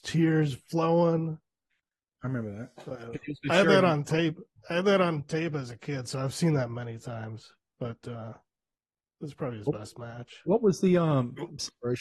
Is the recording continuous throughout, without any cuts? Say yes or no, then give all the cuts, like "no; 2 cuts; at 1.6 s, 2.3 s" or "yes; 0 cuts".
yes; 0 cuts